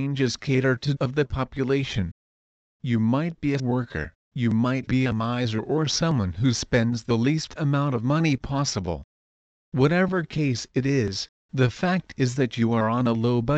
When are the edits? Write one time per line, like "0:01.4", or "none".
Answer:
0:01.0
0:03.6
0:04.2
0:04.9